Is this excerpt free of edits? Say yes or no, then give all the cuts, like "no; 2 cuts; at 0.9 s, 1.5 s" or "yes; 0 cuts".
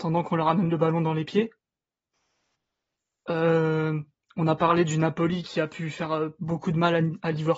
yes; 0 cuts